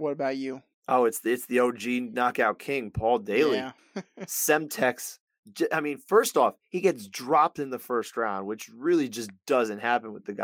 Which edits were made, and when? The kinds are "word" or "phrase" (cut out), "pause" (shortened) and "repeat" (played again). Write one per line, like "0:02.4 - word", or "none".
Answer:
0:03.8 - pause